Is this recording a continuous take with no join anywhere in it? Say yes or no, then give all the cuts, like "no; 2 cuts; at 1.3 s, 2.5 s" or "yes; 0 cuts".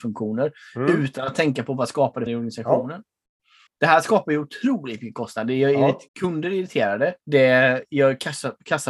no; 4 cuts; at 2.3 s, 3.7 s, 6.1 s, 7.2 s